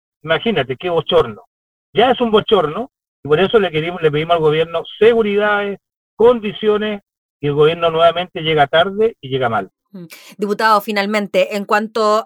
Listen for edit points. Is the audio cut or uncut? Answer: uncut